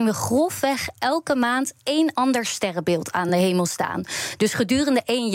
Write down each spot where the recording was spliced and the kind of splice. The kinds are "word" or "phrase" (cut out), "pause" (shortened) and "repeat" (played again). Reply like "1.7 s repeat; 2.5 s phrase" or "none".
none